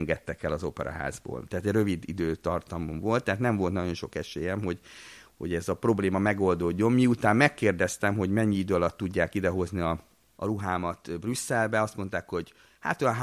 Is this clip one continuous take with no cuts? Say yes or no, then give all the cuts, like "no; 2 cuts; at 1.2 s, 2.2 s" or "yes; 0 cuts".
yes; 0 cuts